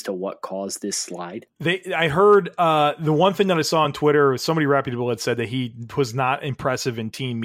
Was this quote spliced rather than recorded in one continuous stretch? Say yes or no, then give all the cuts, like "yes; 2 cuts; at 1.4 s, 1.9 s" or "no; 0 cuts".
no; 0 cuts